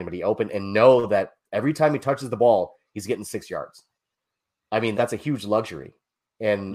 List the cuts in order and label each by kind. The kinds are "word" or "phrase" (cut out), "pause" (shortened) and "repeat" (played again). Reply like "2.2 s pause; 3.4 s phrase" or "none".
4.9 s word